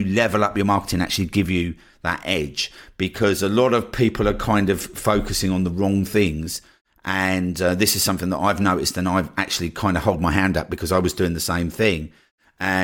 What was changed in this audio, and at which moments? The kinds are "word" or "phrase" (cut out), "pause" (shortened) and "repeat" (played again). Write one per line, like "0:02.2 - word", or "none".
none